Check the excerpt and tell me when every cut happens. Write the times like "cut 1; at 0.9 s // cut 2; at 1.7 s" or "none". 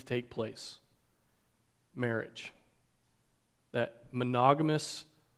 none